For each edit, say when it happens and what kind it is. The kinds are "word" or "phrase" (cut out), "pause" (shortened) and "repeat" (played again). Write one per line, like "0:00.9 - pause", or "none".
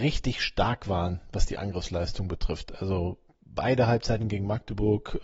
none